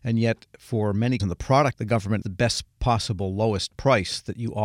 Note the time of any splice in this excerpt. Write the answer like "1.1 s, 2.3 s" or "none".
1.2 s, 1.7 s, 2.2 s

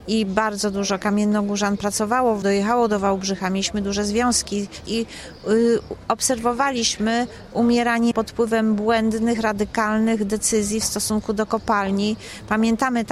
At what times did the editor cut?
2.4 s, 4.9 s, 8.1 s

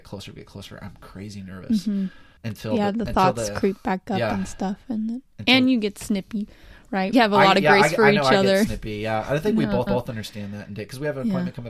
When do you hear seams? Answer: 2.4 s, 7.1 s, 9.9 s

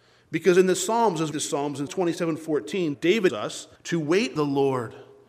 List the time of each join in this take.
1.3 s, 1.9 s, 3.3 s, 3.8 s, 4.4 s

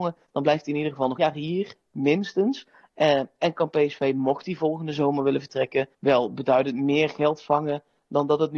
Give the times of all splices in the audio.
1.2 s, 5.9 s

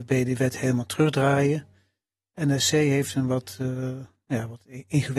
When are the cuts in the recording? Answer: none

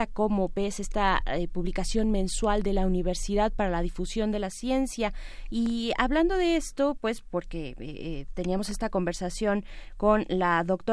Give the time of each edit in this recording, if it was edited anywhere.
none

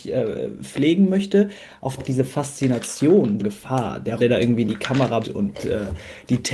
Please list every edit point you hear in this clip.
2.0 s, 3.4 s, 4.2 s, 5.2 s

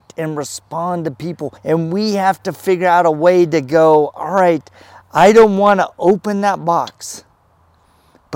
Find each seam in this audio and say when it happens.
1.6 s

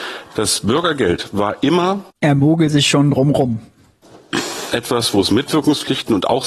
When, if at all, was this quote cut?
2.1 s

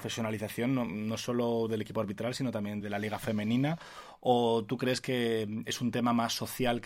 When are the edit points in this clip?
2.8 s

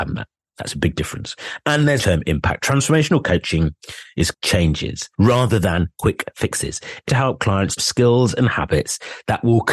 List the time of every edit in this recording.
2.0 s, 4.3 s, 5.1 s, 7.1 s, 7.8 s

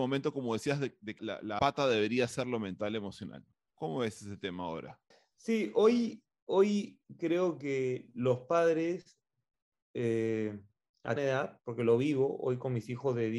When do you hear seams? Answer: 1.2 s, 1.6 s, 3.5 s, 5.1 s, 9.5 s, 11.2 s

